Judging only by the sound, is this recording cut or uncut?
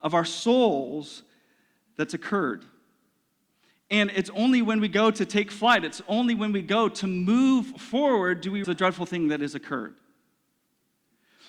cut